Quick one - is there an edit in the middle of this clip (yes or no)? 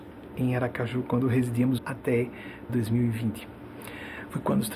yes